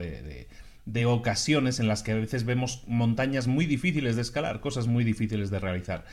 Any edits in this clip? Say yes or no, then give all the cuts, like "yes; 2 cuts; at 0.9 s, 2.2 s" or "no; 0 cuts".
no; 0 cuts